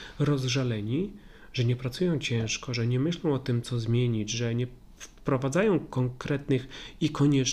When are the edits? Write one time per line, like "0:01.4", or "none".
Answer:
none